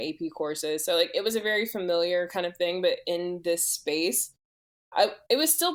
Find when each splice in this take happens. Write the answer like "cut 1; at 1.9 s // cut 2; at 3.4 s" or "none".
none